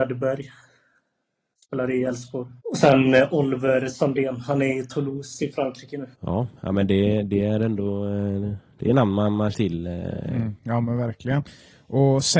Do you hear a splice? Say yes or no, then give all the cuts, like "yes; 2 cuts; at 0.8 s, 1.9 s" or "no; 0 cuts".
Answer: yes; 3 cuts; at 2.6 s, 6.1 s, 9.5 s